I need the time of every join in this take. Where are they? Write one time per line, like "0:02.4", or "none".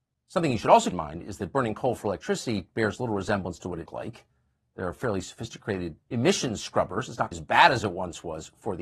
0:00.9
0:03.9
0:06.0
0:07.3